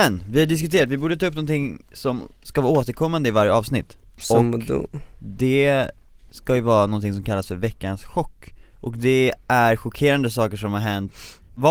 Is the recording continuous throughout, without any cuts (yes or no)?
no